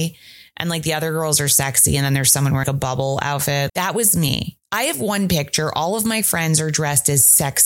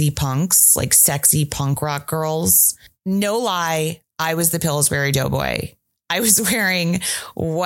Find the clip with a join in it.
first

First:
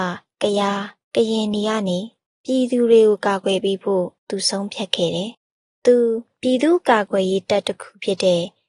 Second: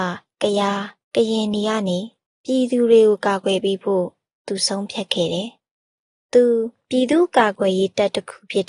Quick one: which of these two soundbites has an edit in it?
first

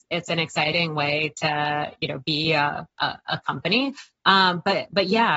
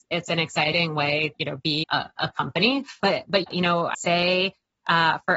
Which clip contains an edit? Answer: second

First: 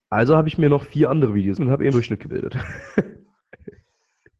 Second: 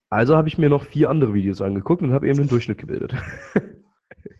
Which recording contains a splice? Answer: first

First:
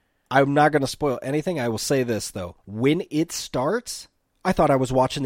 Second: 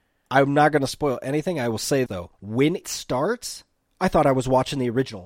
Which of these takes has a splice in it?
second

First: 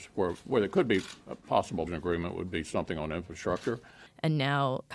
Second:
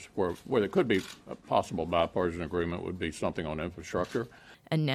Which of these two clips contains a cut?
first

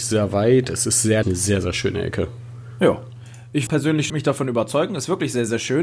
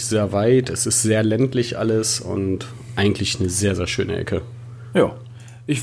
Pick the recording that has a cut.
first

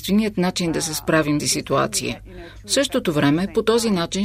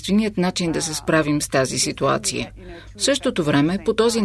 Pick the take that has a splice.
first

